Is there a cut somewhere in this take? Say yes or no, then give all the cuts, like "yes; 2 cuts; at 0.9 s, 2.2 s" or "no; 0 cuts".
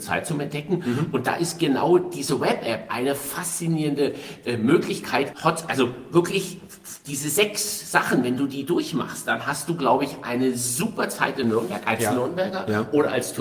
yes; 1 cut; at 5.3 s